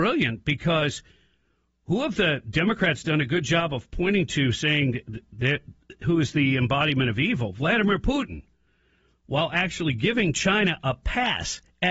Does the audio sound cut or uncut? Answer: uncut